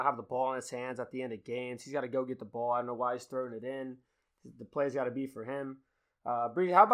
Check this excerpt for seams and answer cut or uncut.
uncut